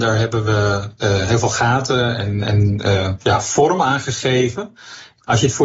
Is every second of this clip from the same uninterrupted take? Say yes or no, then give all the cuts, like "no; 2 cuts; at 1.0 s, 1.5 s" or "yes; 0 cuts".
yes; 0 cuts